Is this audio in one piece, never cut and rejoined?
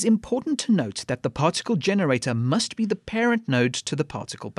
yes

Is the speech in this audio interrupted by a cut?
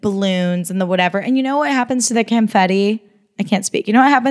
no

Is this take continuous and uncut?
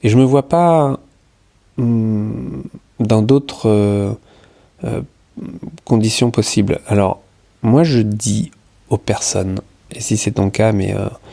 yes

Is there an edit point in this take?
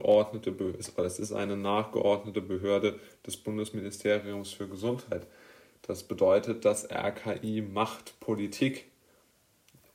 no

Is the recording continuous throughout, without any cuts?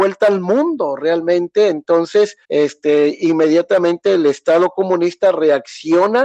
no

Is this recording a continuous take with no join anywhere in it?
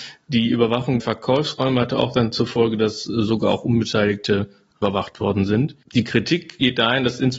no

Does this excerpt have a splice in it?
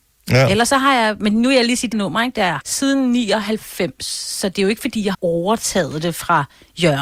yes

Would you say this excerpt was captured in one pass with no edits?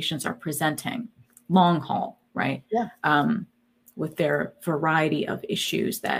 yes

